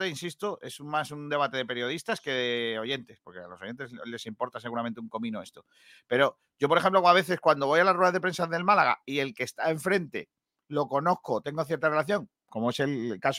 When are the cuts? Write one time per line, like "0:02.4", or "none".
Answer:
none